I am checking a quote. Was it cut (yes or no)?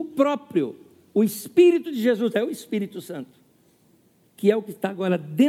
no